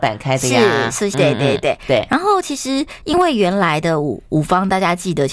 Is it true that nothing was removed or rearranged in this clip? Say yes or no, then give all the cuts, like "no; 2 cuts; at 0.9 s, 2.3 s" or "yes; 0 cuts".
no; 1 cut; at 1.1 s